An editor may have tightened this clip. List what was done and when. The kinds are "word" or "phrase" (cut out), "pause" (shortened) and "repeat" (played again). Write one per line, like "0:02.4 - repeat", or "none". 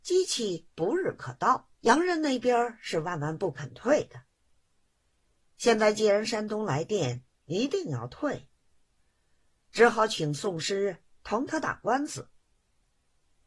0:01.7 - pause

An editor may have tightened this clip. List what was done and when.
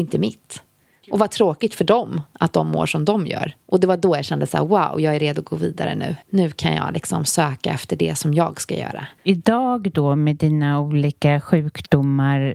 0:03.6 - pause
0:06.2 - pause
0:09.2 - pause

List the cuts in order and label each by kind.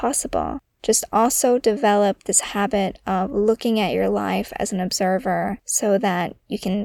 none

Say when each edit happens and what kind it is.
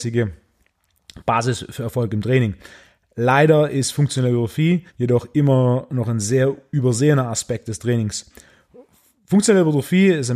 0:04.9 - pause

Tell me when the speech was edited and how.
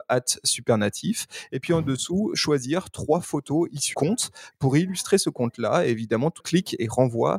0:03.9 - word
0:06.4 - word

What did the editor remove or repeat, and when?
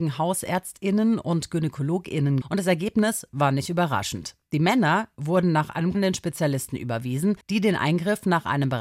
0:02.4 - word
0:05.9 - phrase
0:07.4 - pause

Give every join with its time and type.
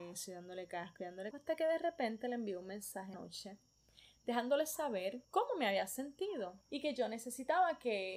0:01.3 - word
0:03.1 - phrase
0:05.2 - pause
0:06.6 - pause

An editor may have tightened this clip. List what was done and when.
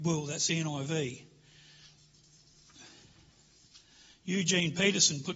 none

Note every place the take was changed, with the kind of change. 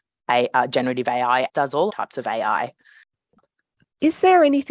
0:01.5 - word
0:01.9 - word

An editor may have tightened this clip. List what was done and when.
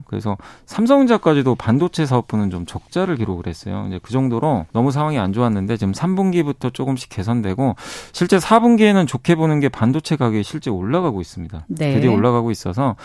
0:04.7 - pause

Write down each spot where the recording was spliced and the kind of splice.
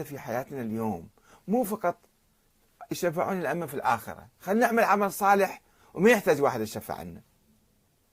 none

